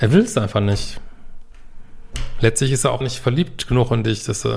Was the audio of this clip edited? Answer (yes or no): yes